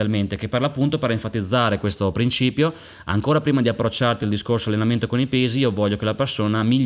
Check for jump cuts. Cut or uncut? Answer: uncut